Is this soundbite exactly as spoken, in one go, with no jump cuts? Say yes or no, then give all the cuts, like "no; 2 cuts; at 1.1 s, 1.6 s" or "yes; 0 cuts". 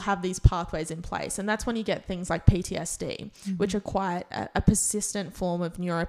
yes; 0 cuts